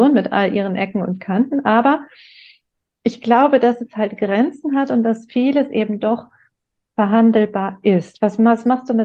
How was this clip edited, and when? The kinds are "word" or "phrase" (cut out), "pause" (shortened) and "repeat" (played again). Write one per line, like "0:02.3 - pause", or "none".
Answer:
none

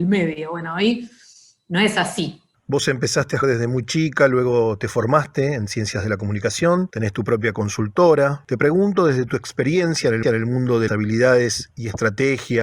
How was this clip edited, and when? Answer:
0:03.4 - word
0:10.2 - repeat
0:10.9 - word

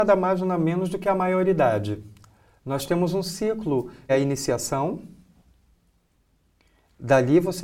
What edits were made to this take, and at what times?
0:04.1 - word

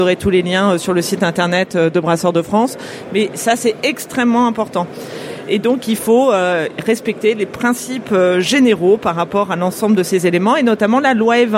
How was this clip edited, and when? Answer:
none

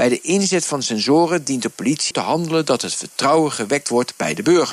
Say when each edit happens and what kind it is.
0:02.1 - word

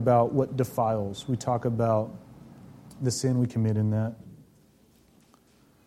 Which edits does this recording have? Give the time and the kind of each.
none

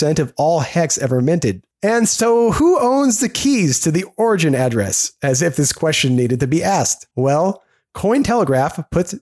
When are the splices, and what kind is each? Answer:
0:01.7 - pause
0:07.1 - pause

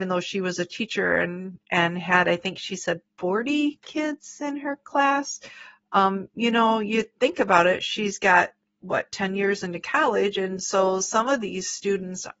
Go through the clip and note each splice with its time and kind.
none

